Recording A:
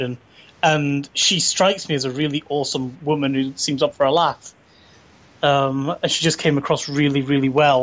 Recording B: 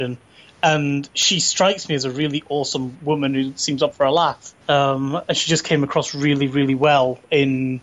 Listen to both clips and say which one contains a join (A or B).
B